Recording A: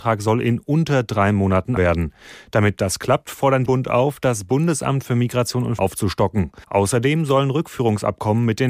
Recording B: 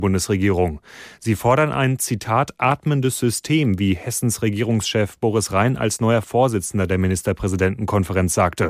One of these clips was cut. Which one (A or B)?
A